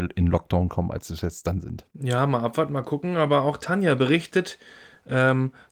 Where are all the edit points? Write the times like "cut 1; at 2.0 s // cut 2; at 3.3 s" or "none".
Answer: cut 1; at 1.9 s